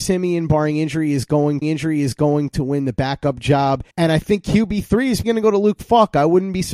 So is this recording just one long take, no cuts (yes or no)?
no